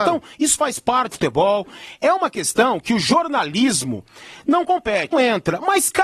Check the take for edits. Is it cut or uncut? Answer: cut